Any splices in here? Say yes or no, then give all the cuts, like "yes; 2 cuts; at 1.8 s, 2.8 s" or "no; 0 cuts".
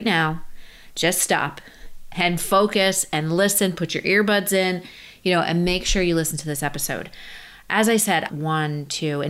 yes; 1 cut; at 8.3 s